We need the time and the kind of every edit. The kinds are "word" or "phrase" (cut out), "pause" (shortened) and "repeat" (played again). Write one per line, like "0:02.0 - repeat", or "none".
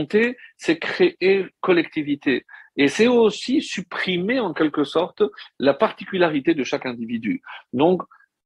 0:01.6 - word

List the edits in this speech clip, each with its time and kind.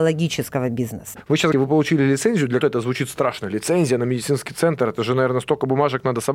0:01.5 - word
0:02.6 - word

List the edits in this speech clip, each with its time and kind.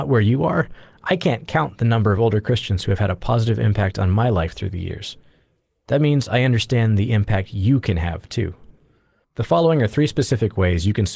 none

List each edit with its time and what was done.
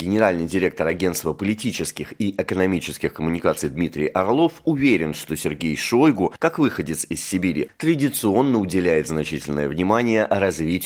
none

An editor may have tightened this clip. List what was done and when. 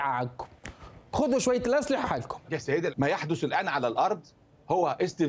0:02.0 - word
0:02.4 - pause
0:02.9 - word

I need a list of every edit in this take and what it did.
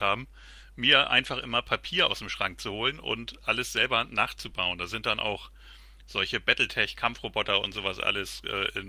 none

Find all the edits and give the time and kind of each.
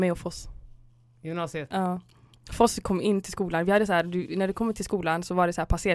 none

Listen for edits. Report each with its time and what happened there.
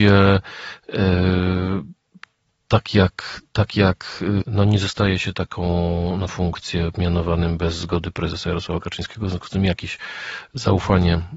0:04.4 - word
0:06.3 - word

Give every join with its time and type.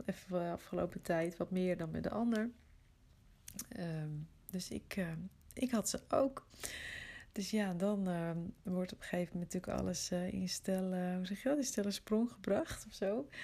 none

